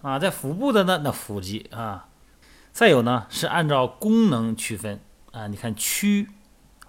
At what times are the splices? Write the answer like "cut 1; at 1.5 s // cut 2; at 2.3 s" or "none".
none